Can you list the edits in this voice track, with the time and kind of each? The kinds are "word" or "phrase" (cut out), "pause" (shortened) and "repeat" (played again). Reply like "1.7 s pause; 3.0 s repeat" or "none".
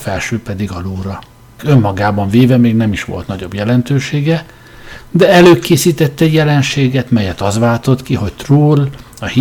1.6 s word